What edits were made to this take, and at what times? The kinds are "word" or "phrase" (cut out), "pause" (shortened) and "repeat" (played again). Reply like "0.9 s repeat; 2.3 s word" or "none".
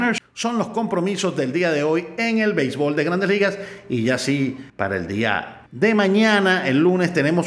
4.7 s pause; 5.7 s pause